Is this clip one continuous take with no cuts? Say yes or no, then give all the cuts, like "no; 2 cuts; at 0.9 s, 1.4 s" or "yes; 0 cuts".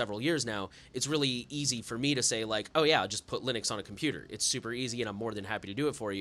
yes; 0 cuts